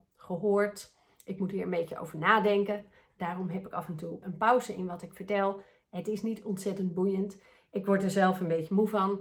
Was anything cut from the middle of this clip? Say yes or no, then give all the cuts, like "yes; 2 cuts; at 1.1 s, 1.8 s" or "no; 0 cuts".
yes; 1 cut; at 4.2 s